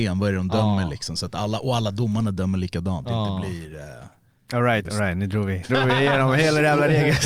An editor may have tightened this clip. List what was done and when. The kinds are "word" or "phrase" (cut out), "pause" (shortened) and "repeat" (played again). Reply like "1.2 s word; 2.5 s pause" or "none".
3.0 s word; 4.8 s word; 5.7 s word

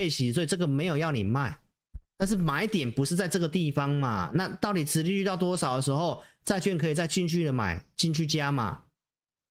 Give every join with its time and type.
none

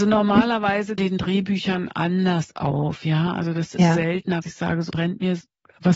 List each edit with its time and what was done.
1.0 s phrase; 4.4 s word; 4.9 s word

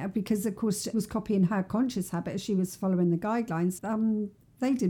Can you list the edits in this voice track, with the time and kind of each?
0.9 s word; 3.8 s word

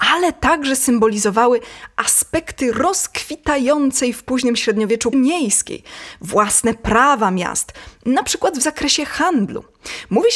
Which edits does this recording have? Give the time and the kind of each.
5.1 s word

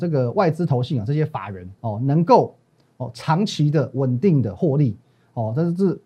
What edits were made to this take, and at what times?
1.8 s pause

